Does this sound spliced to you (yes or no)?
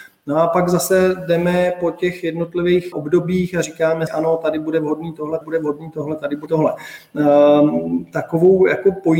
yes